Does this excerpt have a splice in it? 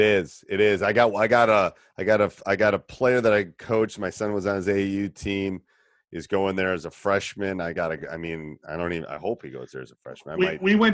no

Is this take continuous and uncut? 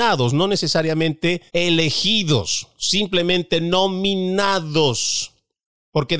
no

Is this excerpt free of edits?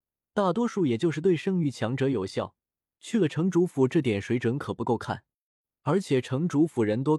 yes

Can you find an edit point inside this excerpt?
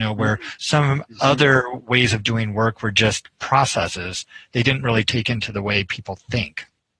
no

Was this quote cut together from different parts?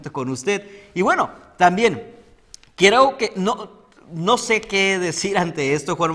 no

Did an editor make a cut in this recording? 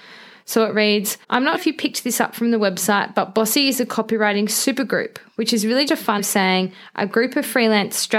yes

